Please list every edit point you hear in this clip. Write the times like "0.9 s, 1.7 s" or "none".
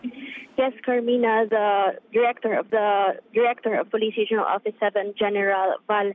2.7 s, 5.1 s